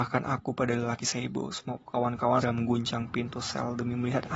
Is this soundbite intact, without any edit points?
no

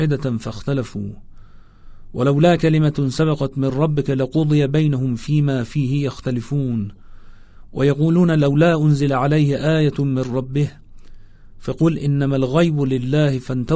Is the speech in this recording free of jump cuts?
yes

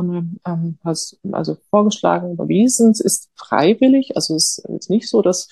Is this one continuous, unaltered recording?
yes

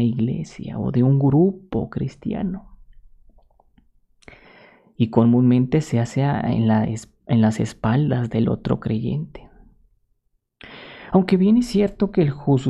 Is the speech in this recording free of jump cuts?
yes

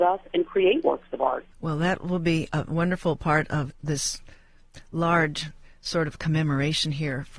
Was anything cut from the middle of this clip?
yes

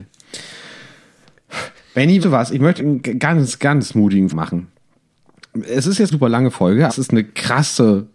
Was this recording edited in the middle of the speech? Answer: yes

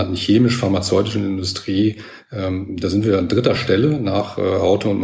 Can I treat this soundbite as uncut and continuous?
yes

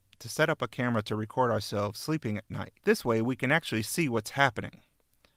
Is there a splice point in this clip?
yes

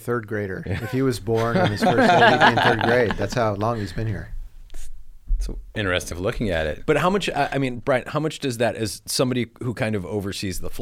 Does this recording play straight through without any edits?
no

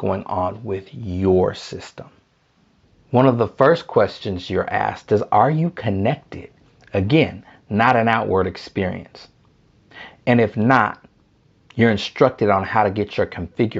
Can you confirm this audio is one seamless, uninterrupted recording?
yes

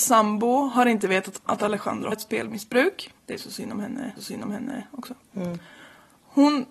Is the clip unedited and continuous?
no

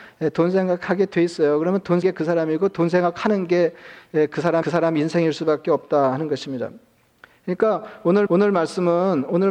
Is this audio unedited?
no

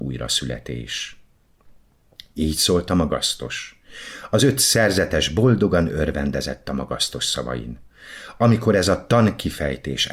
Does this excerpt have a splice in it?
no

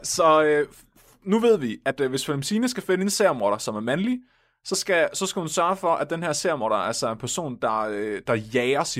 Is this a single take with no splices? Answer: yes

